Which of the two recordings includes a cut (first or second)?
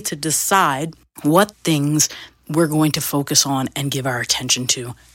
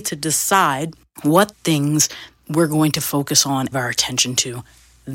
second